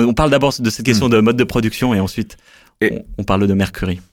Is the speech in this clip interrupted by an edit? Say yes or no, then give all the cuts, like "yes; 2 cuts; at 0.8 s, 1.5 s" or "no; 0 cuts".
no; 0 cuts